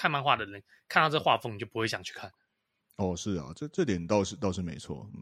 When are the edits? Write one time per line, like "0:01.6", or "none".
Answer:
none